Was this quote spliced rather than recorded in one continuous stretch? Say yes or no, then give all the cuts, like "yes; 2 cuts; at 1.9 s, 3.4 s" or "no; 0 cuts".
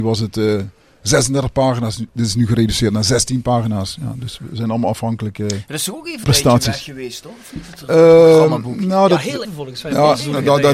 yes; 2 cuts; at 6.2 s, 9.4 s